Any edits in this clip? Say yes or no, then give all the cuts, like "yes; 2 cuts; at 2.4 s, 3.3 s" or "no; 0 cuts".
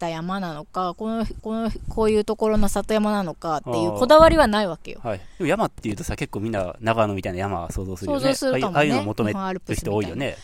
yes; 1 cut; at 1.4 s